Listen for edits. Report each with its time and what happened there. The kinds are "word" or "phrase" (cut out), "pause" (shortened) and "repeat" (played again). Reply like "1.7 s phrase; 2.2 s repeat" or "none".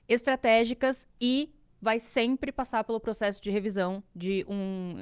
none